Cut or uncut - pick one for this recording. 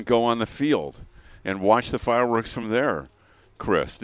uncut